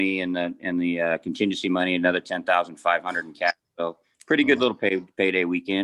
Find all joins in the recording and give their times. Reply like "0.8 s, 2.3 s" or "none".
4.0 s

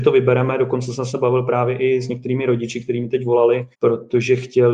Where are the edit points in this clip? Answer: 3.7 s

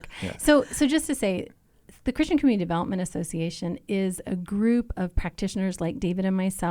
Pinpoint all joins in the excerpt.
none

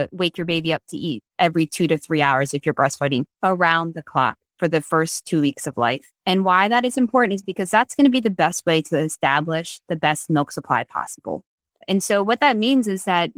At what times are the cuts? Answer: none

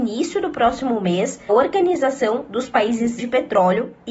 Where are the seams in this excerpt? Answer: 1.5 s, 3.2 s

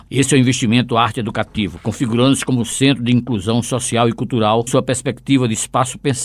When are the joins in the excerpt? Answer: 4.7 s

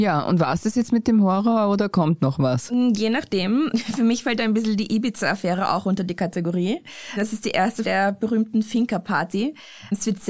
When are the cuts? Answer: 7.8 s

